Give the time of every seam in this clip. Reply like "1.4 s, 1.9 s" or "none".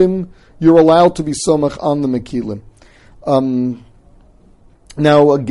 none